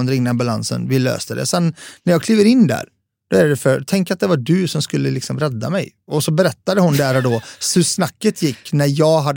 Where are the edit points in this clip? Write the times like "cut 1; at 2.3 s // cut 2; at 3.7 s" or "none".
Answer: none